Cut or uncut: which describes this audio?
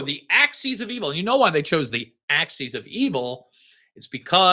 uncut